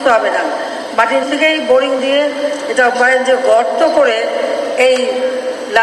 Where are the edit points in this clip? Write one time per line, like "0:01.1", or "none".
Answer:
0:01.2
0:02.0
0:02.9